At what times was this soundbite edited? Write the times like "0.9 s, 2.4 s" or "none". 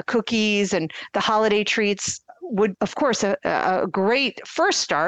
2.7 s